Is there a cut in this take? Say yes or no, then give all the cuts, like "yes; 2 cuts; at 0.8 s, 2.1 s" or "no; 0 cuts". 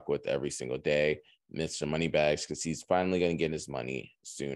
no; 0 cuts